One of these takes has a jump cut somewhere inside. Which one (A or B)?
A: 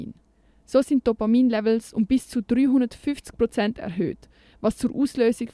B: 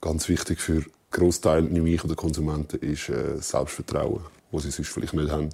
B